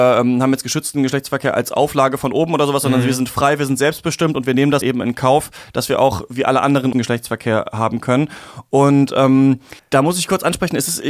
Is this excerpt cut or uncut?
cut